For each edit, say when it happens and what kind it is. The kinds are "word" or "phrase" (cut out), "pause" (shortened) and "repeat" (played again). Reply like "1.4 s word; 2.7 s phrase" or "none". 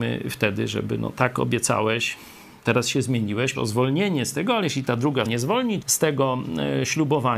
3.5 s word; 5.2 s word; 5.8 s word